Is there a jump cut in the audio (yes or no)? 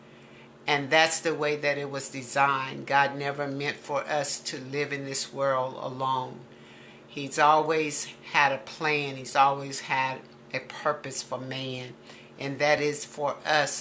no